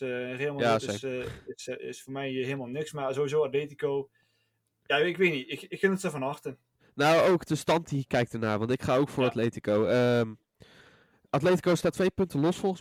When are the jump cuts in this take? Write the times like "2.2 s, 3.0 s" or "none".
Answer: none